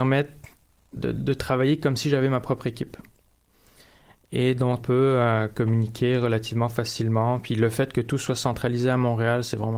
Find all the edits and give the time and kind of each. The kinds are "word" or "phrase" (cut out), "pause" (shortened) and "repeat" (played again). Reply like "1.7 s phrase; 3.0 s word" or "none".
1.0 s word; 4.8 s word